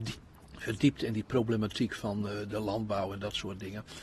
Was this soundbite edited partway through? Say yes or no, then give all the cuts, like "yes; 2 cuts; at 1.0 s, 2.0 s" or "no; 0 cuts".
no; 0 cuts